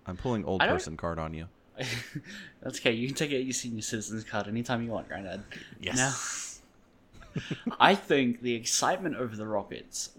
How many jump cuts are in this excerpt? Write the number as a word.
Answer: one